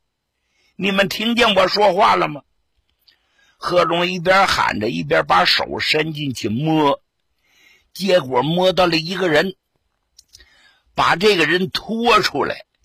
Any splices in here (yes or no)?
no